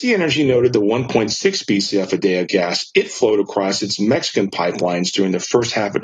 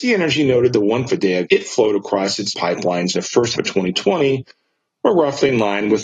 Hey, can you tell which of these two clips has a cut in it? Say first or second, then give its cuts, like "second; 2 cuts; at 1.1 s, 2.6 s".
second; 5 cuts; at 1.1 s, 1.5 s, 2.5 s, 3.1 s, 3.5 s